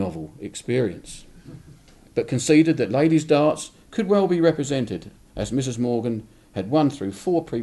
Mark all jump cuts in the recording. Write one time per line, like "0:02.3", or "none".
none